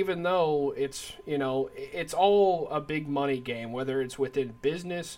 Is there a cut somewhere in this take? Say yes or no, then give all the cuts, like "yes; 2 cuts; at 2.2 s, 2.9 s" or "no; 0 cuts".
no; 0 cuts